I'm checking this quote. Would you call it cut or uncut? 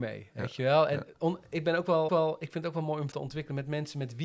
cut